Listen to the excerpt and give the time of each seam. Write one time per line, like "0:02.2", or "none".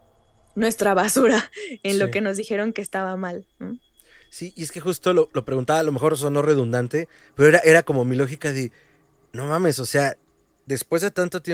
none